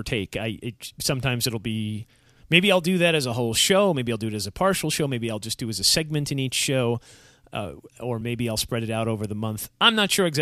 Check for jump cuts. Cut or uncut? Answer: uncut